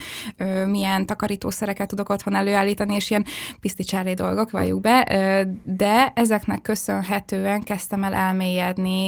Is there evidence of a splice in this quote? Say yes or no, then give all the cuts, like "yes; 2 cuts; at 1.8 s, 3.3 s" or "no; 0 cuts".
no; 0 cuts